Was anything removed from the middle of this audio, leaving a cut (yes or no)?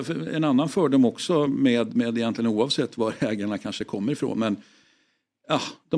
no